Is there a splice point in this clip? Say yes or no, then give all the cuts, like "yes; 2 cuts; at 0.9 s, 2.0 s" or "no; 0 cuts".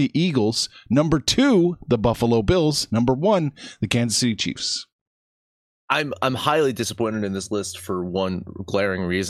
no; 0 cuts